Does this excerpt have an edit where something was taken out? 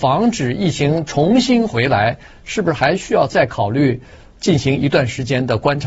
no; 0 cuts

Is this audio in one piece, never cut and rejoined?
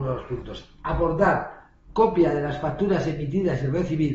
yes; 0 cuts

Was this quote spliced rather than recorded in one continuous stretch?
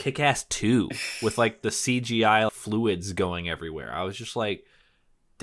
yes; 1 cut; at 2.5 s

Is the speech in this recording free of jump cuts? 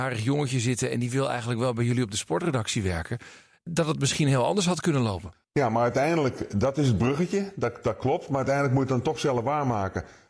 yes; 0 cuts

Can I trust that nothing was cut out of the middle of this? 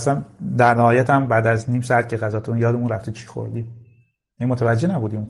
yes; 0 cuts

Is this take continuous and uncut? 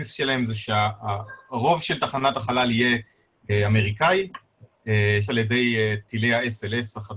no; 1 cut; at 5.3 s

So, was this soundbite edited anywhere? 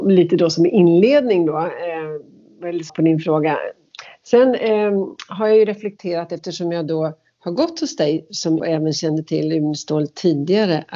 yes; 2 cuts; at 2.9 s, 8.6 s

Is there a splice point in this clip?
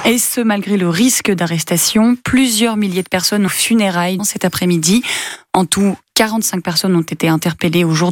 yes; 2 cuts; at 3.5 s, 4.2 s

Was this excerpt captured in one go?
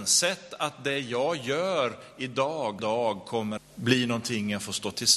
no; 2 cuts; at 2.8 s, 3.6 s

